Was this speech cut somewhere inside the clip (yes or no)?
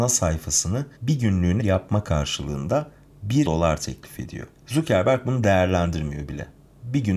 yes